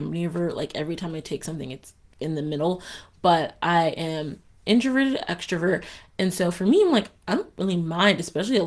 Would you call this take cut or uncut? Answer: uncut